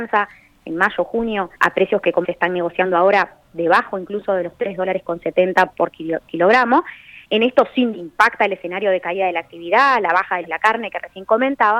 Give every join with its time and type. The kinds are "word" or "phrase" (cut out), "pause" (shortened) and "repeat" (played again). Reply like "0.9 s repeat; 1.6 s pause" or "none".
1.5 s pause; 2.2 s word; 5.7 s word; 6.3 s word; 7.9 s word; 10.4 s phrase